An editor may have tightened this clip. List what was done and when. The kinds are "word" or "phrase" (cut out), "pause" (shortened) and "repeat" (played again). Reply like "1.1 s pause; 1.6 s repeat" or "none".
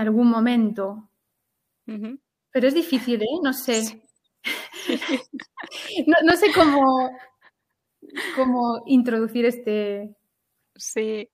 none